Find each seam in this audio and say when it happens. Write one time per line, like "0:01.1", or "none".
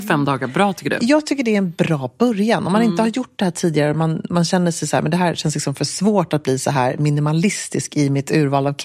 none